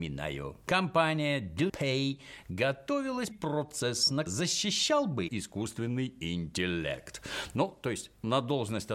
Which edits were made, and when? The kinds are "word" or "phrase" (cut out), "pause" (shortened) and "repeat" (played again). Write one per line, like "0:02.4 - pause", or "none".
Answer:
0:01.7 - word
0:03.3 - word
0:04.3 - phrase
0:05.3 - phrase